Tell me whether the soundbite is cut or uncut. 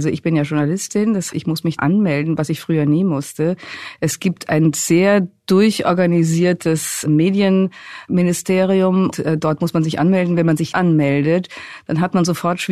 cut